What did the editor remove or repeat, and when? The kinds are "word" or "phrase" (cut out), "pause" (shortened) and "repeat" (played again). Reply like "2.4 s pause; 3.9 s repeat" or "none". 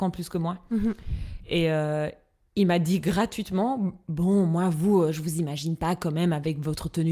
none

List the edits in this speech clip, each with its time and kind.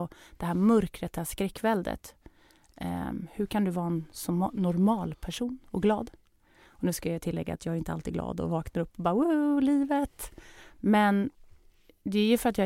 none

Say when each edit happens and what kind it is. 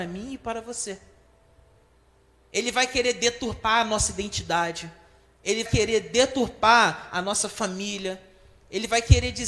5.6 s word

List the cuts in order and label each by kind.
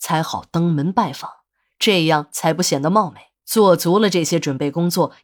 3.4 s pause

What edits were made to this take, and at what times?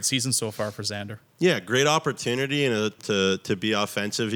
3.0 s phrase

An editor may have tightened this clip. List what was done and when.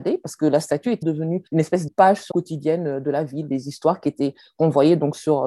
1.0 s word; 1.5 s pause; 1.9 s phrase; 2.3 s phrase

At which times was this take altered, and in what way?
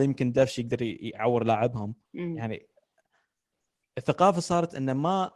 2.0 s pause

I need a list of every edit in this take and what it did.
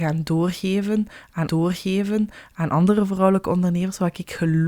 1.5 s repeat

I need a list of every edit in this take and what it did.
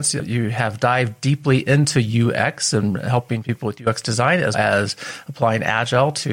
4.5 s word

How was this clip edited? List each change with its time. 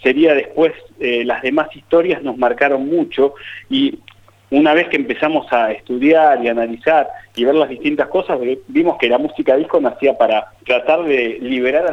10.6 s pause

